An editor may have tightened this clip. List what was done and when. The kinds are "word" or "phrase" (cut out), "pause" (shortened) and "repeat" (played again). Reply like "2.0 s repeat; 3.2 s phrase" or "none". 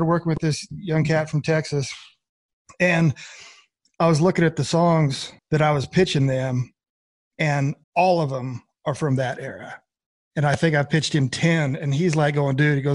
5.4 s pause; 7.8 s pause; 10.1 s pause